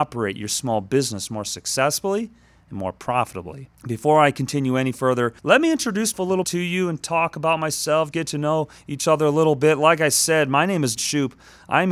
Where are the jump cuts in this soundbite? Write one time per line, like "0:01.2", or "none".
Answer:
0:03.7
0:05.4
0:06.1
0:06.4
0:08.1
0:11.0